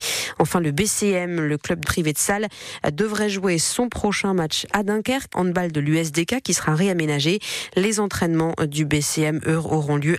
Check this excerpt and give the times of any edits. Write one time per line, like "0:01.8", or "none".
0:01.8
0:05.3